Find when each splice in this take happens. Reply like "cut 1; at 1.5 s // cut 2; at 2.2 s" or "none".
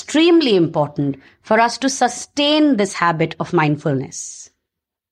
none